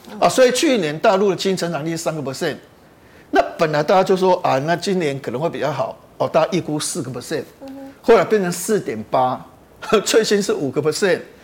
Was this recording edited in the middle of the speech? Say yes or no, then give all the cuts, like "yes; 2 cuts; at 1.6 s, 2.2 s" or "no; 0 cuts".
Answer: no; 0 cuts